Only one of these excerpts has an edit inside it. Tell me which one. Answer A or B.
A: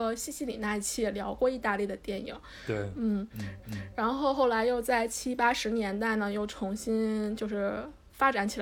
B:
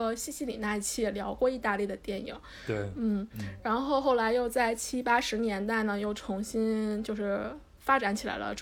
A